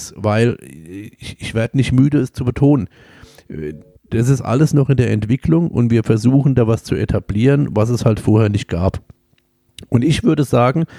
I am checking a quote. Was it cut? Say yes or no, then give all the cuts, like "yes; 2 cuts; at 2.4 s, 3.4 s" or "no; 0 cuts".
no; 0 cuts